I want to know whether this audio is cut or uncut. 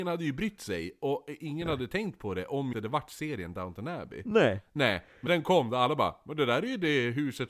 cut